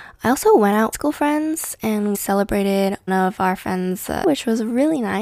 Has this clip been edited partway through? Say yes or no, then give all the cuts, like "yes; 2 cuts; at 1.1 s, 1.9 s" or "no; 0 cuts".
yes; 4 cuts; at 0.9 s, 2.1 s, 3.1 s, 4.2 s